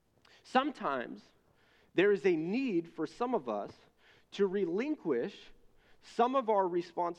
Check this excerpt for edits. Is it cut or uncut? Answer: uncut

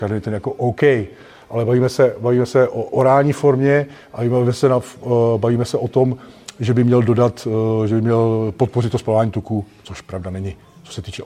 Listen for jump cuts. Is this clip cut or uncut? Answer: uncut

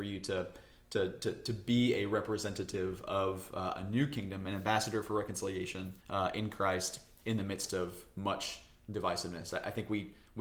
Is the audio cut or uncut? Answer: cut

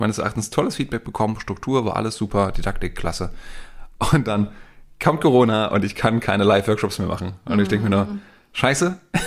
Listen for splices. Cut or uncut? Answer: uncut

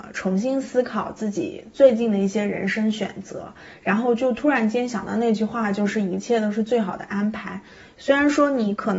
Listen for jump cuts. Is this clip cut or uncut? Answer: uncut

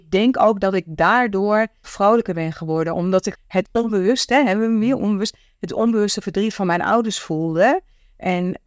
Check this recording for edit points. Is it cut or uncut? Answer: cut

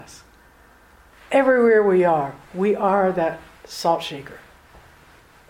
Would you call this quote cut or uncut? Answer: uncut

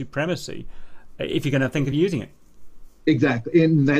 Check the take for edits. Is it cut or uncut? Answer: uncut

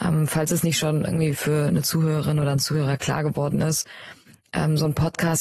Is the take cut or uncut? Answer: uncut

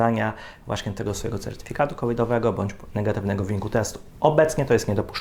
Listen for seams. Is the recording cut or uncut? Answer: uncut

